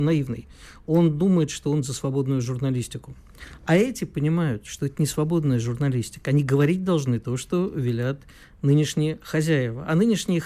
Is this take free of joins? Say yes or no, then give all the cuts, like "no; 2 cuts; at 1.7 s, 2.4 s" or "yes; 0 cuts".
yes; 0 cuts